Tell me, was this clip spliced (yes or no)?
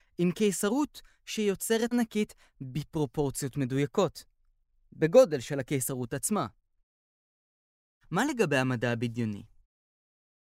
yes